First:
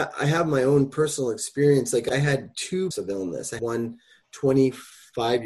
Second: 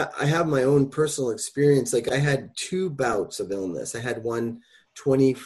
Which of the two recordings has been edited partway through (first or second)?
first